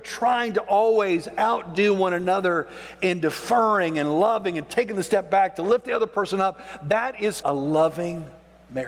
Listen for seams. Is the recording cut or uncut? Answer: cut